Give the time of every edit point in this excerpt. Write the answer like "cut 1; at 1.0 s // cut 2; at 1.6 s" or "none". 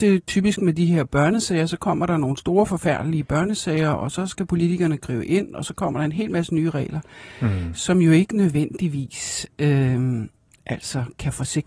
none